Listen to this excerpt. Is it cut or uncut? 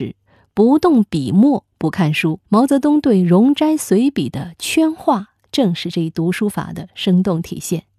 cut